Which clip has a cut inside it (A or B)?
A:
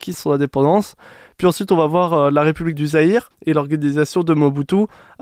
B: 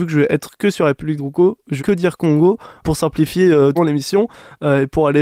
B